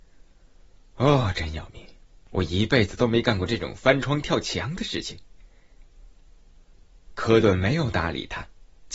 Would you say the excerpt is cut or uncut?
uncut